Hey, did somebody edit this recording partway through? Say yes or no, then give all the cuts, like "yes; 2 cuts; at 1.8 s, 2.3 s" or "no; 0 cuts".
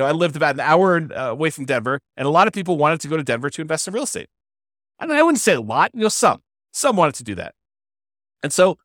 no; 0 cuts